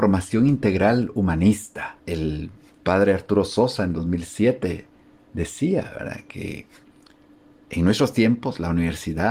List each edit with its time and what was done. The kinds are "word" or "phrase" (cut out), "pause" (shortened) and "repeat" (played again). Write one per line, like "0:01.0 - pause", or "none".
none